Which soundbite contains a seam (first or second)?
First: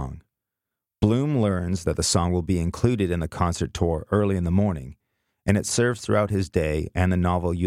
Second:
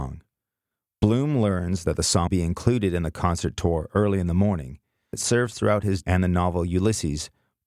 second